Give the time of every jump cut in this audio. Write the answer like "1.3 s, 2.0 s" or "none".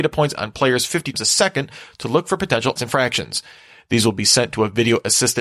1.1 s, 2.8 s